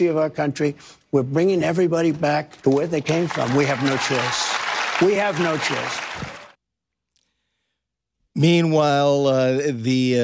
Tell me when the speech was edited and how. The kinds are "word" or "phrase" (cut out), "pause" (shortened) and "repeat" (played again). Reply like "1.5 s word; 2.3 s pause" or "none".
none